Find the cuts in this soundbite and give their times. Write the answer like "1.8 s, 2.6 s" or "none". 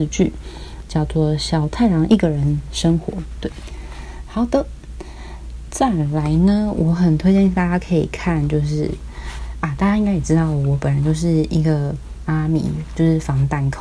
2.1 s